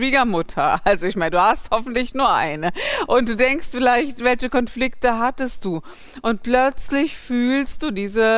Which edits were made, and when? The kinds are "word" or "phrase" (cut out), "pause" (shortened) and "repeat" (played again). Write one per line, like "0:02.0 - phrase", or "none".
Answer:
none